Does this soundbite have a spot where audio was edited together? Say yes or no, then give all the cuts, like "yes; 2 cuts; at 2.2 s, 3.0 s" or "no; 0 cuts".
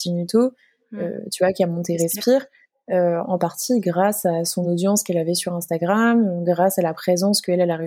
no; 0 cuts